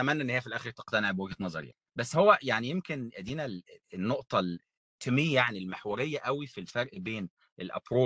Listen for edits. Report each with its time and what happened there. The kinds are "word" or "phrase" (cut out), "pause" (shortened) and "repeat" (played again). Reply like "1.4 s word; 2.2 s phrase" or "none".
3.8 s pause